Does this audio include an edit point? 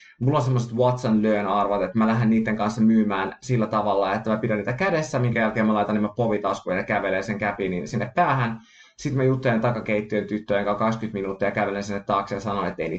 no; 0 cuts

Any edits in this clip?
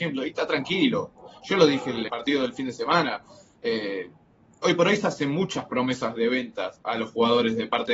yes; 1 cut; at 2.1 s

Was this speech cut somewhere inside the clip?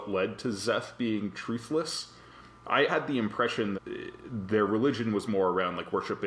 yes; 3 cuts; at 2.9 s, 3.7 s, 5.3 s

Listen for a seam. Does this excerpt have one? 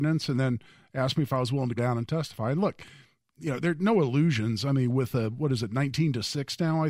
yes; 1 cut; at 1.8 s

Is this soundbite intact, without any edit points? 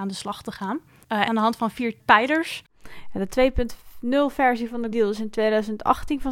no; 2 cuts; at 1.3 s, 4.9 s

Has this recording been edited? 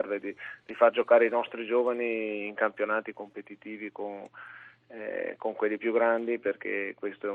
no; 0 cuts

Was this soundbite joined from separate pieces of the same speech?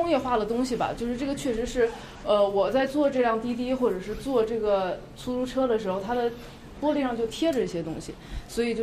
no; 0 cuts

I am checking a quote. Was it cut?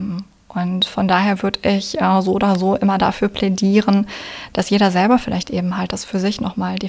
no; 0 cuts

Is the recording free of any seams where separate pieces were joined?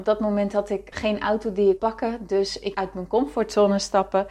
no; 3 cuts; at 0.9 s, 1.8 s, 2.7 s

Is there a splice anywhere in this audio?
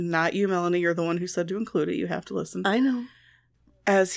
no; 0 cuts

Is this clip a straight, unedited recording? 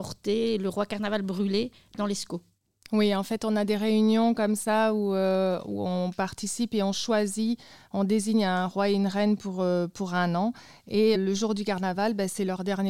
no; 1 cut; at 11.1 s

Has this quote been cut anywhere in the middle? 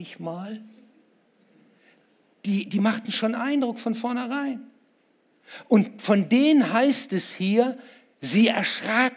no; 0 cuts

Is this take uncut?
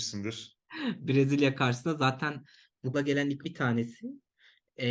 no; 2 cuts; at 2.9 s, 3.4 s

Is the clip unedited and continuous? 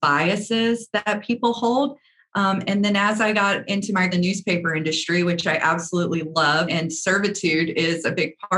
no; 3 cuts; at 2.7 s, 4.1 s, 6.7 s

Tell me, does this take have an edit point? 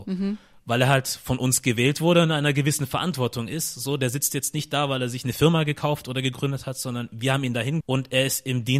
yes; 1 cut; at 7.8 s

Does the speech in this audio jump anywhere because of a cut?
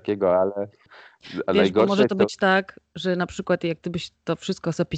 no; 0 cuts

